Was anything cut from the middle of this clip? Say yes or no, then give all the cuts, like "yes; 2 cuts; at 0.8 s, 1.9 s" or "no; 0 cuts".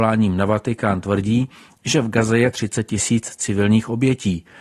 no; 0 cuts